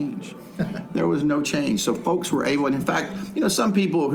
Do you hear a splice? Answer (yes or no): no